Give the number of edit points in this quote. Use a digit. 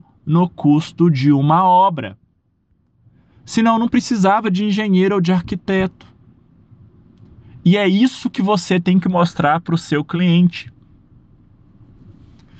0